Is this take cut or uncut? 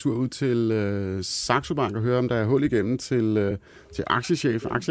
uncut